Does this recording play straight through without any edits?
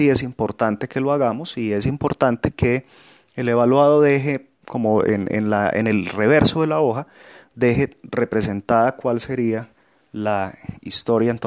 no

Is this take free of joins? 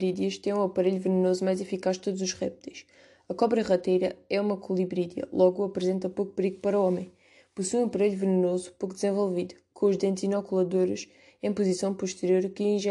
yes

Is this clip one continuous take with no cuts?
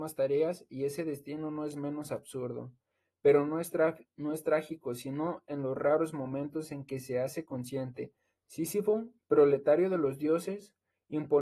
yes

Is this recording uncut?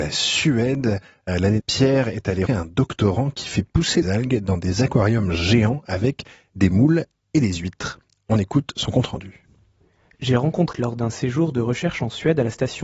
no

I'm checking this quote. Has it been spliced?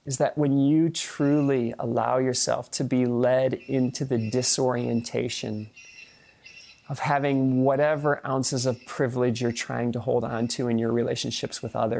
no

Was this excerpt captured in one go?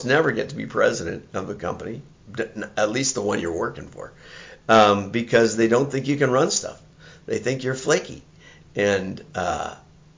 yes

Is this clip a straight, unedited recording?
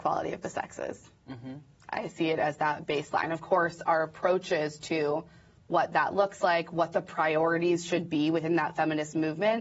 yes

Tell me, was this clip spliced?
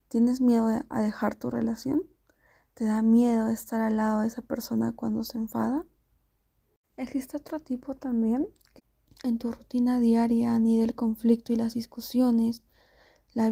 no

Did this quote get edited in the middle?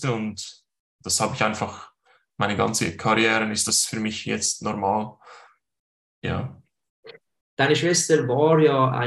no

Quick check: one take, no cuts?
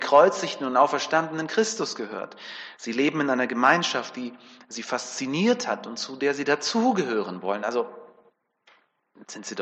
yes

